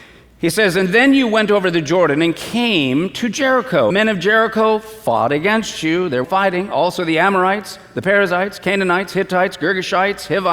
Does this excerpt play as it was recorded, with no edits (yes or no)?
no